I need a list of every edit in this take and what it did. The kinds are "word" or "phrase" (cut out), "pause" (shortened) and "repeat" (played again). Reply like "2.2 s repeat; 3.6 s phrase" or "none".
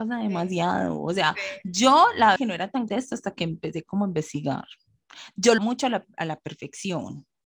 2.4 s word; 2.9 s word; 5.6 s word